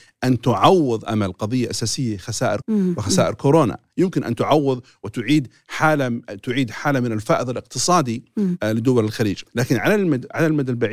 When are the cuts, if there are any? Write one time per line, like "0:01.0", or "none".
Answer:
0:02.6
0:09.5